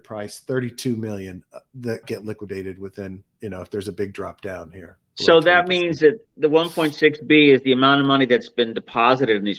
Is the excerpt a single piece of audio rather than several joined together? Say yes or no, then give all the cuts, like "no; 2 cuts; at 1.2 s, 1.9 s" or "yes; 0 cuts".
no; 2 cuts; at 2.0 s, 3.3 s